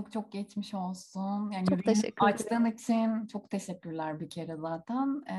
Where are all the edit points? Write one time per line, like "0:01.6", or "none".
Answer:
none